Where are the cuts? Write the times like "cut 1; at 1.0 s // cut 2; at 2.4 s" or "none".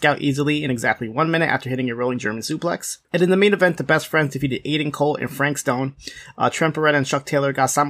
cut 1; at 3.0 s